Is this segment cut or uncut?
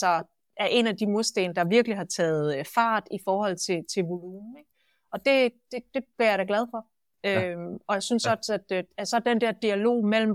uncut